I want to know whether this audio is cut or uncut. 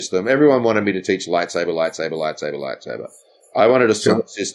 uncut